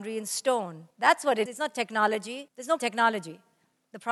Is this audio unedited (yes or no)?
no